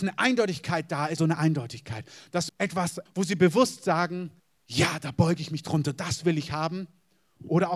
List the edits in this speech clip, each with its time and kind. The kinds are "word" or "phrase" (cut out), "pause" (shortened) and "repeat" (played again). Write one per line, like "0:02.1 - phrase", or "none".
0:01.2 - phrase
0:02.5 - word
0:03.1 - word
0:04.4 - pause